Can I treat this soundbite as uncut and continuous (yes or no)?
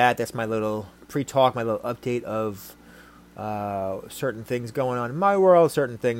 yes